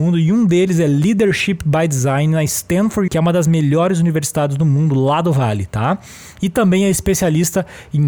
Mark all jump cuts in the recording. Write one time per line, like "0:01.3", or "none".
0:03.1